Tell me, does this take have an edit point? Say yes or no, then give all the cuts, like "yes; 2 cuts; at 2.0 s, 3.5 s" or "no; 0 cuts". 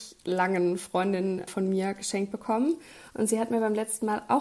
yes; 1 cut; at 1.5 s